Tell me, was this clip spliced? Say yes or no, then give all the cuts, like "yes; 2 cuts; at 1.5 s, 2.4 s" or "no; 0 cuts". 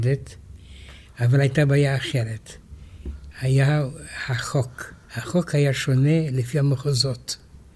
yes; 1 cut; at 5.0 s